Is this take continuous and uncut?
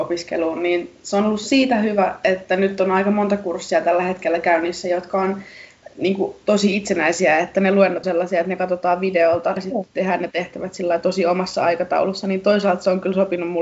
no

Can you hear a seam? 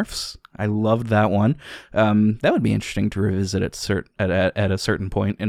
no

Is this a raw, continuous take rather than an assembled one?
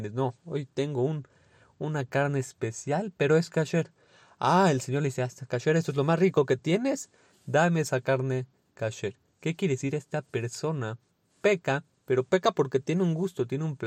yes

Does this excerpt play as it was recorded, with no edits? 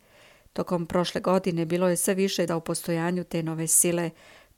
no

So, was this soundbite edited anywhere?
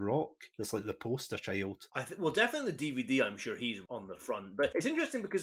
no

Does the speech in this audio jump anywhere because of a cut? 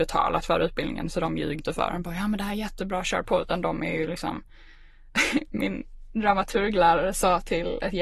yes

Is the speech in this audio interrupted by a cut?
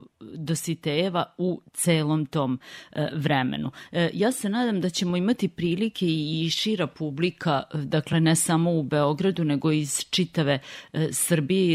no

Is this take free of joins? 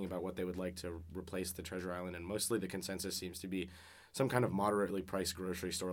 yes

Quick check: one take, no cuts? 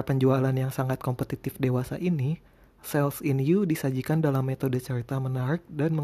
yes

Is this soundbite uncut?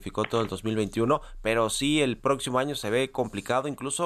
yes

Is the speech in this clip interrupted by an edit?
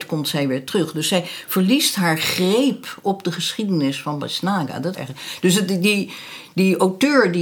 yes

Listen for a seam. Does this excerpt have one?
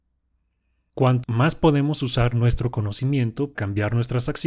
yes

